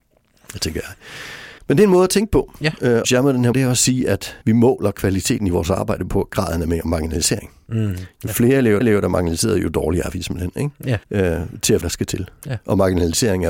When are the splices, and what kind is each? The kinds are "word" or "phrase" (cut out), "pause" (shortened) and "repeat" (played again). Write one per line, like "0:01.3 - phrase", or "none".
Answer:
0:01.6 - pause
0:03.0 - phrase
0:03.5 - word
0:04.4 - pause
0:08.8 - repeat
0:11.0 - pause
0:11.8 - phrase